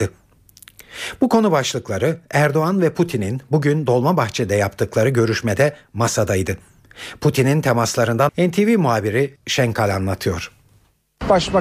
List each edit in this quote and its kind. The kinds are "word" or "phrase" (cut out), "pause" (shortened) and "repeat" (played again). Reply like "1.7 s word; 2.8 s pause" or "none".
8.3 s word; 9.4 s word